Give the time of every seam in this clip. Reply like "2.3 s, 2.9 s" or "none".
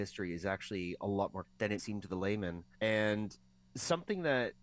1.4 s, 1.8 s, 2.7 s